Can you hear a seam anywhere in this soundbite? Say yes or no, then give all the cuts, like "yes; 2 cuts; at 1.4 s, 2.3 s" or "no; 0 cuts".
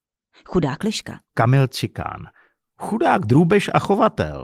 yes; 1 cut; at 1.3 s